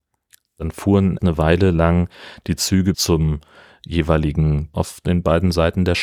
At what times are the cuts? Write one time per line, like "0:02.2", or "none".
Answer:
0:01.2
0:02.9
0:04.7